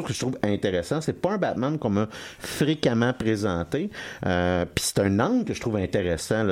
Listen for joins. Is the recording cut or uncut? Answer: uncut